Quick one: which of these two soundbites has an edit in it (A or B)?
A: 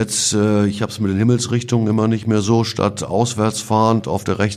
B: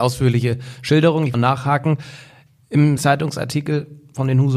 B